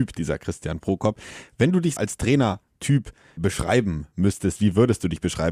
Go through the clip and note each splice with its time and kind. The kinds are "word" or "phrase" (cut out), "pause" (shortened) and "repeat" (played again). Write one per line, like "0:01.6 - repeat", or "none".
0:02.0 - word
0:03.4 - word